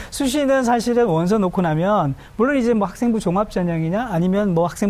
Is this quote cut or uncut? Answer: uncut